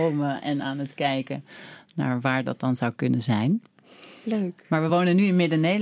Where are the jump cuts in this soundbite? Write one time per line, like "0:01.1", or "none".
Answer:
none